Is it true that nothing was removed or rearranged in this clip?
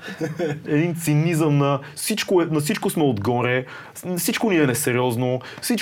yes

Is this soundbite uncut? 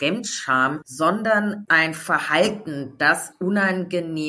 no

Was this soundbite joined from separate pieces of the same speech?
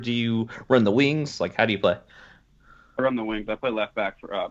yes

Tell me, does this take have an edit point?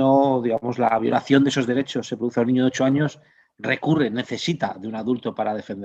no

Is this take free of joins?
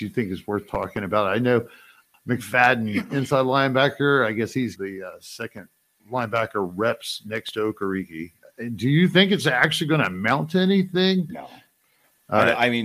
no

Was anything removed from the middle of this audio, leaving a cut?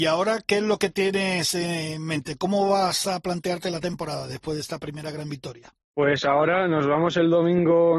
yes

